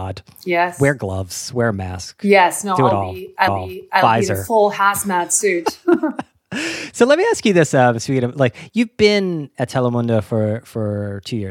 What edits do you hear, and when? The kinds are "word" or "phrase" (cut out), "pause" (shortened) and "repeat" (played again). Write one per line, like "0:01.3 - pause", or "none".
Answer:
0:03.5 - repeat